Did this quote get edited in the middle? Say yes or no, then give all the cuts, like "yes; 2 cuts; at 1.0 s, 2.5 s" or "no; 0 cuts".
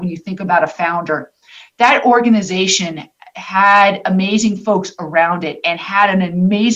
no; 0 cuts